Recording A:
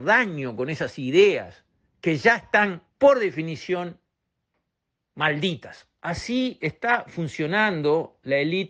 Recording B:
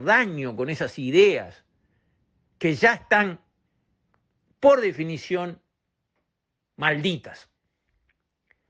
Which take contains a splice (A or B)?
A